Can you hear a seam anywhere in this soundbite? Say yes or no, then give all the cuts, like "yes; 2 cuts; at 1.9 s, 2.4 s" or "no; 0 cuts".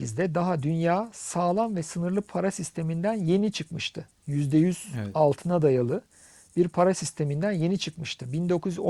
no; 0 cuts